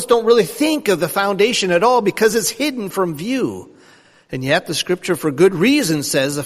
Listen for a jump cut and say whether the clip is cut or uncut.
uncut